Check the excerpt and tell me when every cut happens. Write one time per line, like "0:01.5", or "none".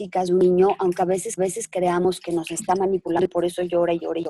0:01.4

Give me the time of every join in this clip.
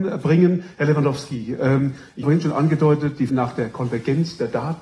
0:02.2
0:03.3

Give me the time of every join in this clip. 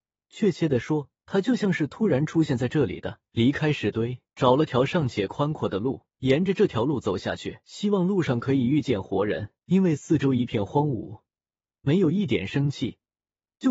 0:01.1
0:03.3
0:04.3
0:06.1
0:07.6
0:09.6

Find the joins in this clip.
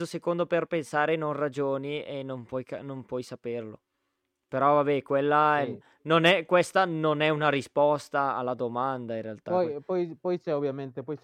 none

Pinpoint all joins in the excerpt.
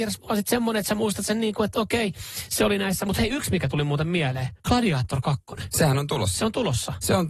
0:04.6

